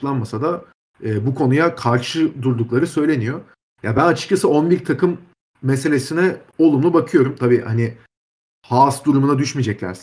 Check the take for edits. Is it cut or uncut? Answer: uncut